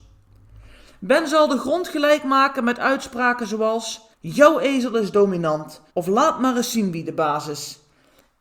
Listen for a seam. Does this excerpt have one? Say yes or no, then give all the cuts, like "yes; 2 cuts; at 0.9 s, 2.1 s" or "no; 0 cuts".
yes; 2 cuts; at 4.1 s, 5.9 s